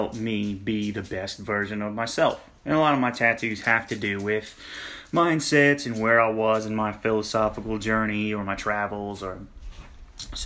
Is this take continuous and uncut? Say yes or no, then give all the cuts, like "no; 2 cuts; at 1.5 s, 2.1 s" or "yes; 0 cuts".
no; 1 cut; at 2.6 s